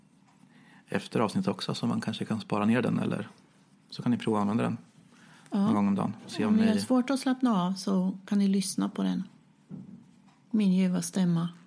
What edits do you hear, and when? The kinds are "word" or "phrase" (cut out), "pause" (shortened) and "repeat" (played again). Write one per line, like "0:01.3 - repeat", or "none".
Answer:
none